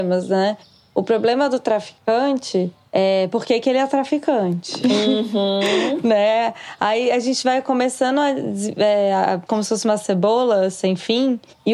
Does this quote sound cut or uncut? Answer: cut